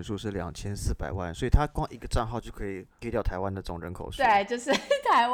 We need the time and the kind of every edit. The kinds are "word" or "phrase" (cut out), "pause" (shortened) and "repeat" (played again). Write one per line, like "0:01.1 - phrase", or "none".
0:03.0 - word